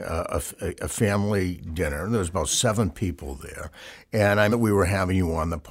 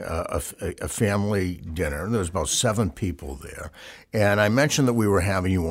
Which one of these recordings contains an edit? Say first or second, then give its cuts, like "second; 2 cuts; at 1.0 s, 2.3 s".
first; 1 cut; at 4.5 s